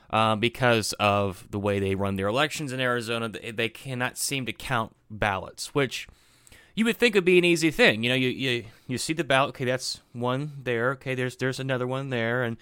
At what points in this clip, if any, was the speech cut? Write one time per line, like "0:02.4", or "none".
none